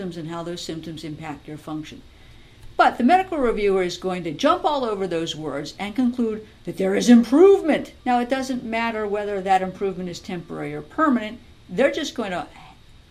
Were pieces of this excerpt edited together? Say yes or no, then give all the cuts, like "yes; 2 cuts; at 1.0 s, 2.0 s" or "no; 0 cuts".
yes; 1 cut; at 8.0 s